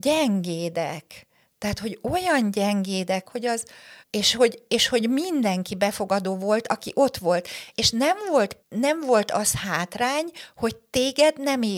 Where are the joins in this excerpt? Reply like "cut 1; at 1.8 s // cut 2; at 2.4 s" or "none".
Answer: cut 1; at 3.2 s // cut 2; at 4.0 s // cut 3; at 7.7 s // cut 4; at 8.6 s